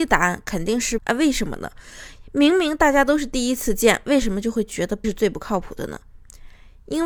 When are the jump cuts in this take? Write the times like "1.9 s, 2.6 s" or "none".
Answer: 1.0 s, 5.0 s